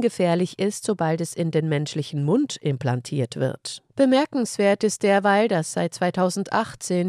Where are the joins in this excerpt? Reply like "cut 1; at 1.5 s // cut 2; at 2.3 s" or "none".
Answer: cut 1; at 3.9 s